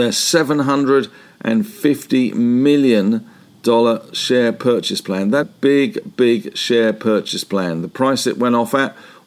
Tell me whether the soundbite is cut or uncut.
cut